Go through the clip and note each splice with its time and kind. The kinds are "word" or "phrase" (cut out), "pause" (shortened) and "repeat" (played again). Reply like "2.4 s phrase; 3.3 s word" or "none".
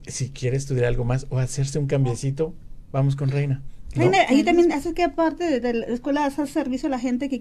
none